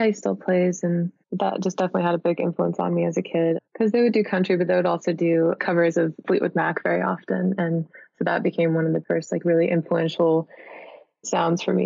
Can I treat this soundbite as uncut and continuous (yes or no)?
no